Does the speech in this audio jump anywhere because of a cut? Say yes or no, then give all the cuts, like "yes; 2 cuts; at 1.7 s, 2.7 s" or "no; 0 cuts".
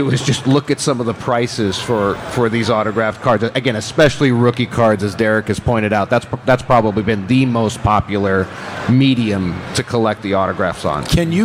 no; 0 cuts